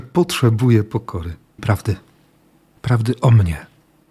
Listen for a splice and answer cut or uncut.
cut